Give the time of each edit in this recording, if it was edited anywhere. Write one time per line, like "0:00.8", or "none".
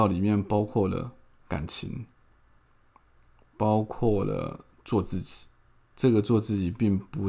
0:05.6